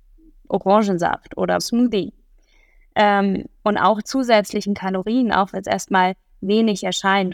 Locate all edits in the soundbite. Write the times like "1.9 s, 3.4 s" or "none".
1.6 s, 4.0 s, 5.5 s